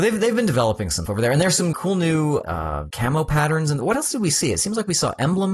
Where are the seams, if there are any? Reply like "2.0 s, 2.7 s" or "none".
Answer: 1.1 s, 1.7 s, 2.4 s, 2.9 s